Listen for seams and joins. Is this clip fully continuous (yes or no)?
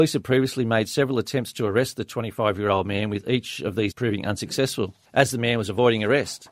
no